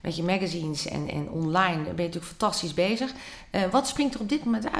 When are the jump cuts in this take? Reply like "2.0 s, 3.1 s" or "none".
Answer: none